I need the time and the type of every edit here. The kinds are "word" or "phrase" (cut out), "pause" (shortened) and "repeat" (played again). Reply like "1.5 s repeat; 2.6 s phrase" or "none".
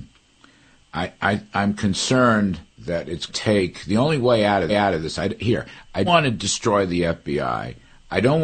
2.7 s pause; 3.3 s phrase; 4.7 s repeat; 6.1 s word